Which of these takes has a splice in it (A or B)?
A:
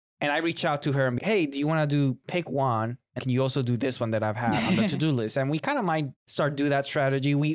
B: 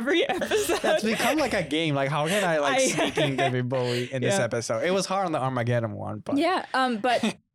A